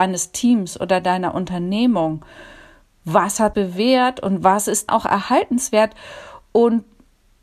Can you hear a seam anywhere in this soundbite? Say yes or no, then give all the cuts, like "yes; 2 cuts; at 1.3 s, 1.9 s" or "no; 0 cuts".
yes; 2 cuts; at 3.5 s, 4.9 s